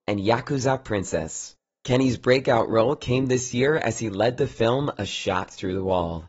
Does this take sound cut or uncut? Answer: uncut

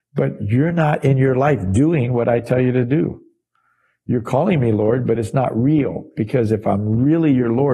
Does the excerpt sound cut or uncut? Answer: uncut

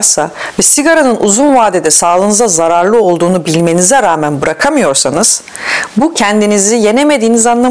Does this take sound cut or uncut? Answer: uncut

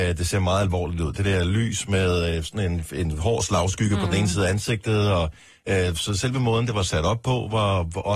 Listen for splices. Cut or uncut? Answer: uncut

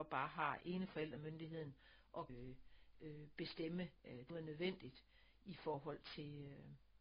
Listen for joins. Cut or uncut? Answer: cut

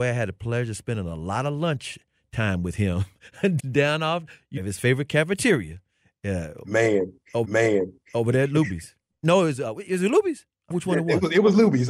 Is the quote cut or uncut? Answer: cut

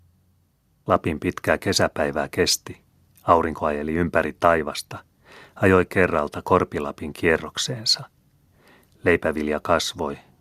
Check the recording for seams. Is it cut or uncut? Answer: cut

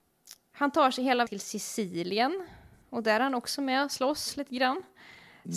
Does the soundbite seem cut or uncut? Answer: cut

